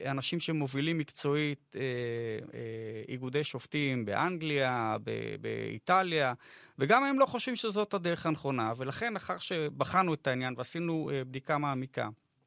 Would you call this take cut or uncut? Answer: uncut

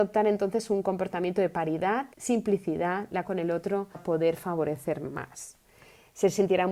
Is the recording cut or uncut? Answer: cut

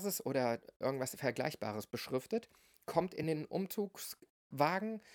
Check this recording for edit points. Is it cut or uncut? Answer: uncut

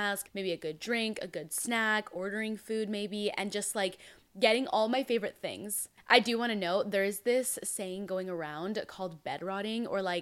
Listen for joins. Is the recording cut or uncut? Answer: uncut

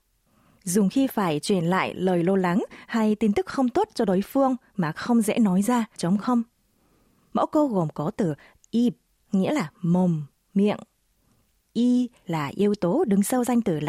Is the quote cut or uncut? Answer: cut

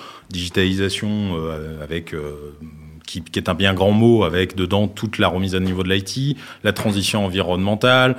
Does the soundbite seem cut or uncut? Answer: uncut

